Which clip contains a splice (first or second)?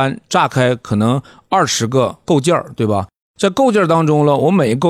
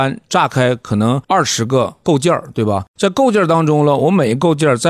second